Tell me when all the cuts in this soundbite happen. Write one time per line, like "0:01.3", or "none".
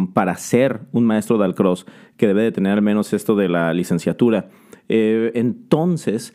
none